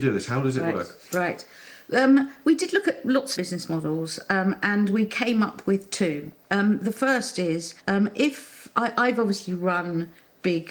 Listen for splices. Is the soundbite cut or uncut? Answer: cut